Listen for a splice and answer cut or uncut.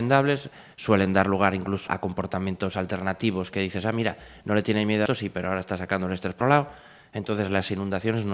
cut